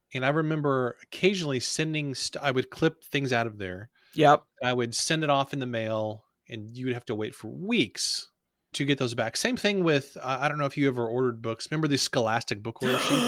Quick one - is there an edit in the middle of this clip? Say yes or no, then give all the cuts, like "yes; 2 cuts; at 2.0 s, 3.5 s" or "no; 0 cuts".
yes; 1 cut; at 8.7 s